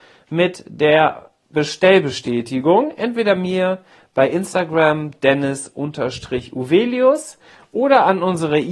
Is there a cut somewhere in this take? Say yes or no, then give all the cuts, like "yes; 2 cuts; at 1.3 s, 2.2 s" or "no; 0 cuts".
no; 0 cuts